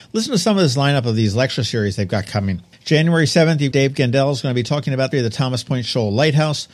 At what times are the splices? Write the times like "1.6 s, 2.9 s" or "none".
3.7 s, 5.1 s